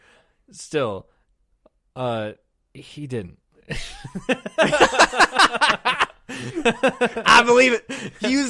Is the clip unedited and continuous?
yes; 0 cuts

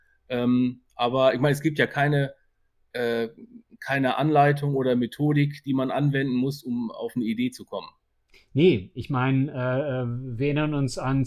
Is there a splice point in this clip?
no; 0 cuts

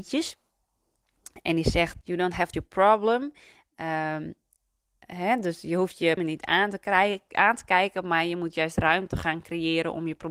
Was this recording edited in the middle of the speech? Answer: yes; 3 cuts; at 2.0 s, 2.5 s, 6.2 s

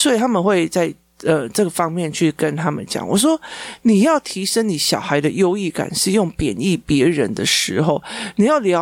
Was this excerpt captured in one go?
yes; 0 cuts

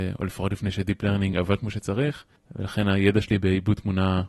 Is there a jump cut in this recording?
no; 0 cuts

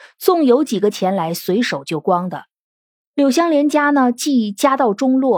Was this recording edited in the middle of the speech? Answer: no; 0 cuts

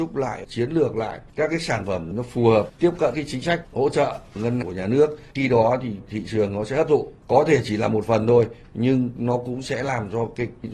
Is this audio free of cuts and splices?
no; 3 cuts; at 2.1 s, 3.1 s, 4.6 s

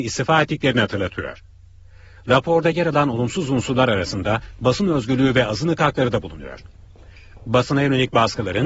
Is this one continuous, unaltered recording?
yes; 0 cuts

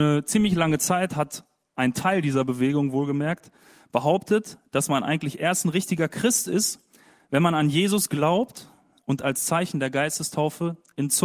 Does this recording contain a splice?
no; 0 cuts

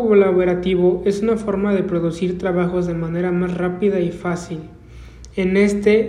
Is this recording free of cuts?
yes; 0 cuts

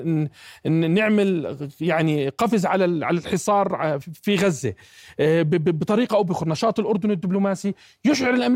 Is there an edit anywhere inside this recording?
no; 0 cuts

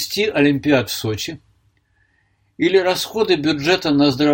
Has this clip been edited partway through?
no; 0 cuts

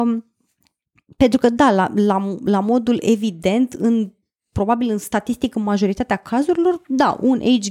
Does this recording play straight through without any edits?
yes; 0 cuts

